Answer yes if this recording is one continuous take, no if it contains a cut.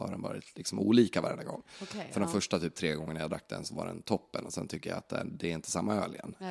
yes